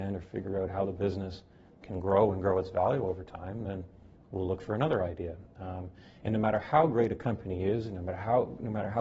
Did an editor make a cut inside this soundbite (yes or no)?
no